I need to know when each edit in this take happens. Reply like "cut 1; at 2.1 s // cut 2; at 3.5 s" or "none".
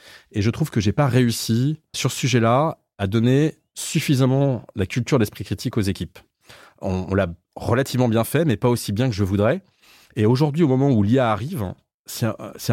cut 1; at 1.9 s